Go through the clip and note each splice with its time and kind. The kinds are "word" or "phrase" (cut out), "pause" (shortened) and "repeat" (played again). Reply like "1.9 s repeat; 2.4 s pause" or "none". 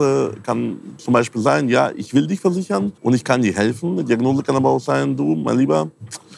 3.0 s pause